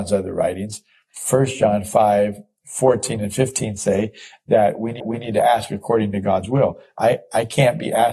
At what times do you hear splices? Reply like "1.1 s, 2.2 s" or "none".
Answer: 5.0 s